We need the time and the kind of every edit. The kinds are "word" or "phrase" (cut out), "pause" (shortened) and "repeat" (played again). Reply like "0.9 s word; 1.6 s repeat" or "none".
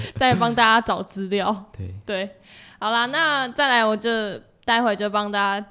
none